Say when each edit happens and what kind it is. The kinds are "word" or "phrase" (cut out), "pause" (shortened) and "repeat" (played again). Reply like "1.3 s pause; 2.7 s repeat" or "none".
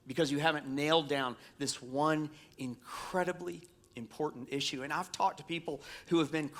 none